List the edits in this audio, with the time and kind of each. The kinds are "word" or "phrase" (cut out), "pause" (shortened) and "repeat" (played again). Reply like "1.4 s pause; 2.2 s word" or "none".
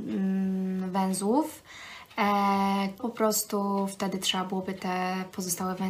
3.0 s word